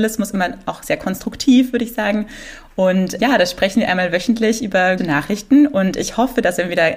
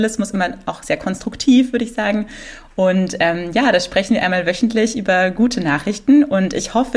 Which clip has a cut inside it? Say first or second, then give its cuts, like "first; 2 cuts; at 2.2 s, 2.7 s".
first; 2 cuts; at 3.2 s, 5.0 s